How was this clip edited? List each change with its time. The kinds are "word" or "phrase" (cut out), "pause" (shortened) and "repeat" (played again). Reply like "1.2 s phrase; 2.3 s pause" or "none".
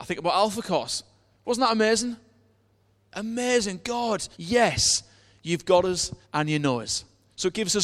4.3 s pause; 6.2 s pause

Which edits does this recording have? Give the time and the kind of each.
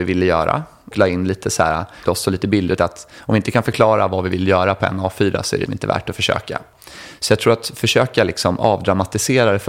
0.9 s word; 2.1 s word; 2.8 s word; 5.7 s word

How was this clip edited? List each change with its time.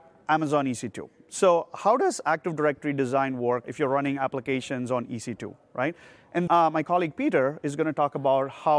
3.6 s word; 6.5 s word

